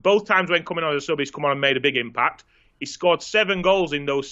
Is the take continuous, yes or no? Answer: yes